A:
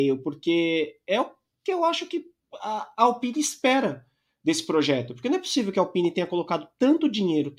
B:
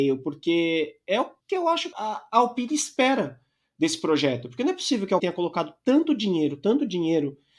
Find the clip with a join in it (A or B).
B